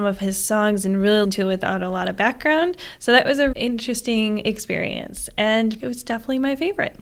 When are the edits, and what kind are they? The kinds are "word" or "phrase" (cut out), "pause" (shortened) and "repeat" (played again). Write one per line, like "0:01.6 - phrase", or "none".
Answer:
0:01.2 - word
0:03.5 - word
0:05.8 - word